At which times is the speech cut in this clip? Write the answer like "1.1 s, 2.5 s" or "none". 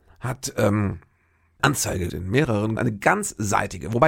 1.6 s, 2.1 s, 2.8 s